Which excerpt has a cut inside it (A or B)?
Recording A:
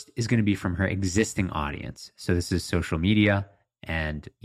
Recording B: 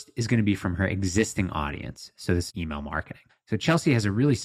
B